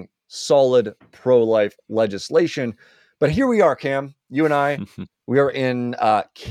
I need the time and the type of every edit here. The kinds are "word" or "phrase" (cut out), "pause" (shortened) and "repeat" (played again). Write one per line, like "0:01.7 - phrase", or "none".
none